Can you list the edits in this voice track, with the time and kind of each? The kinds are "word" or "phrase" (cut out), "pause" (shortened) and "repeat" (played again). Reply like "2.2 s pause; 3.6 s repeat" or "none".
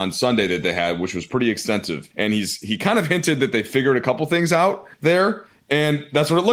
2.1 s pause; 4.9 s pause